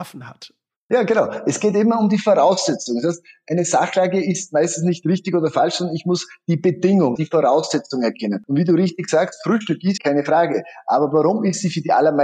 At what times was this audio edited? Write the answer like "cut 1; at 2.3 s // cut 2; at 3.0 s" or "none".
cut 1; at 7.2 s // cut 2; at 10.0 s